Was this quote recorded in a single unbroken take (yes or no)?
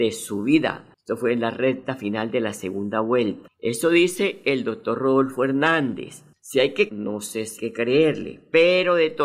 no